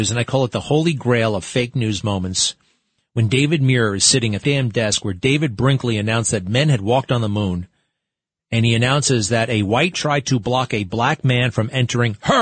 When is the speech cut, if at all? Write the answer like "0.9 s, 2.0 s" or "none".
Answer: 4.4 s, 9.9 s